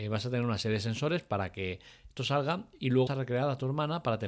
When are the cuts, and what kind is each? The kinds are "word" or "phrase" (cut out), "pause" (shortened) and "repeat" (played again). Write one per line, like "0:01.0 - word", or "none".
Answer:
0:02.2 - phrase
0:03.1 - word